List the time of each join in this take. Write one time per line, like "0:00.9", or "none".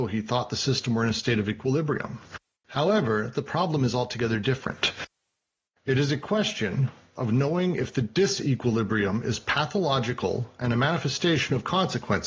none